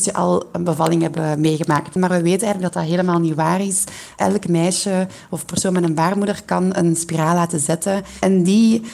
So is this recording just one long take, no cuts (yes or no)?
yes